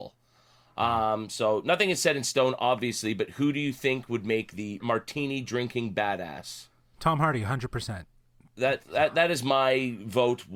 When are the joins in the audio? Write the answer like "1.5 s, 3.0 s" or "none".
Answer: 4.8 s